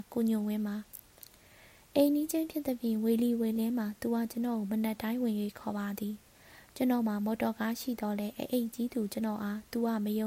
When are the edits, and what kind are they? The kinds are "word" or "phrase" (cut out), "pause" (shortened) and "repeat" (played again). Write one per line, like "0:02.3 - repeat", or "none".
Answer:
none